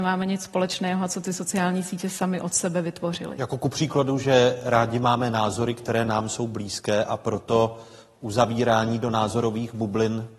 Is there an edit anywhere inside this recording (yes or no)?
no